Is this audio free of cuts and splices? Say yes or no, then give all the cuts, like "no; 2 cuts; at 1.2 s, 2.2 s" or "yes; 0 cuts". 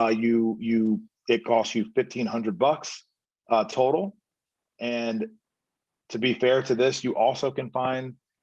yes; 0 cuts